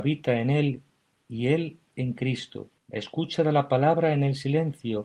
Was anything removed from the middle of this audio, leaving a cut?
yes; 1 cut; at 2.8 s

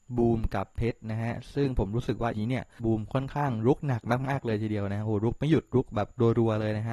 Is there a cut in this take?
yes; 1 cut; at 2.3 s

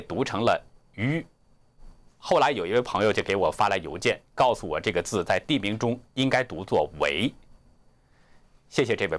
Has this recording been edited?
no; 0 cuts

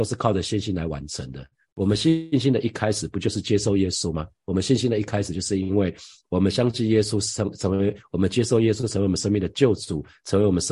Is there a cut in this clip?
no; 0 cuts

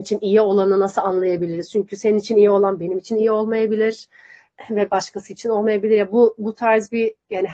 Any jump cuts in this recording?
no; 0 cuts

